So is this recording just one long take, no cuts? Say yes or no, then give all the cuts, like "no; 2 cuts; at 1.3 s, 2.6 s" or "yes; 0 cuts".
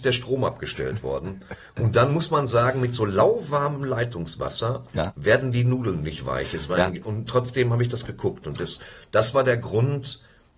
yes; 0 cuts